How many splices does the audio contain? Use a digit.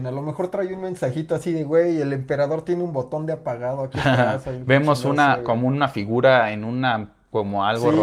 0